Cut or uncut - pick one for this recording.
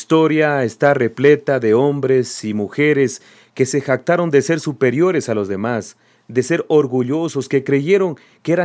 uncut